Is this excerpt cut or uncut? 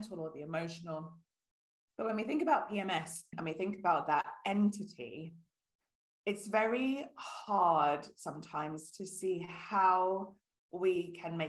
uncut